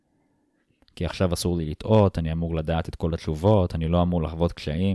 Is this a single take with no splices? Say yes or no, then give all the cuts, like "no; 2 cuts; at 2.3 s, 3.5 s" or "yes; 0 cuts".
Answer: yes; 0 cuts